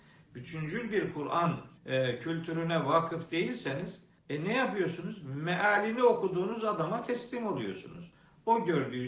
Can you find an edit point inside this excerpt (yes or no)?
yes